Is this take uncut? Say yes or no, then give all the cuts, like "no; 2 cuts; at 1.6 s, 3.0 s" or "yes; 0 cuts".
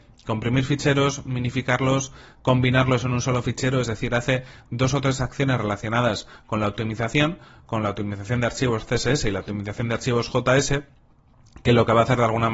yes; 0 cuts